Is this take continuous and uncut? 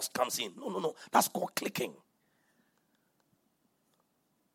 yes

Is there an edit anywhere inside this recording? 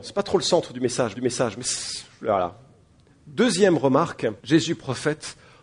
yes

